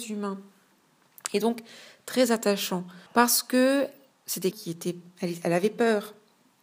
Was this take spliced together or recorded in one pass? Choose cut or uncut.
cut